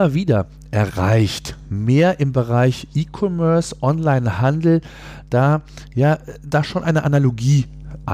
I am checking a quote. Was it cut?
no; 0 cuts

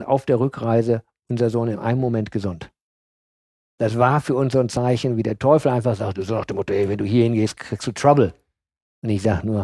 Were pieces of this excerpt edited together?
no; 0 cuts

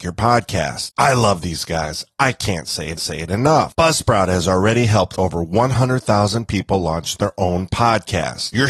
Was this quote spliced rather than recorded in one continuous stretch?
yes; 1 cut; at 3.0 s

